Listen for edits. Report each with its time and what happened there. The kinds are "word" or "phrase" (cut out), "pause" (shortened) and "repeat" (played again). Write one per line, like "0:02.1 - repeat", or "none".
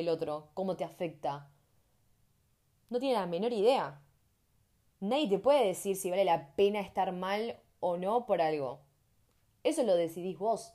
none